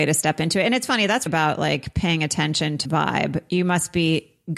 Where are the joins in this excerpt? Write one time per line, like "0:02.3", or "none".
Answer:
0:01.3
0:02.8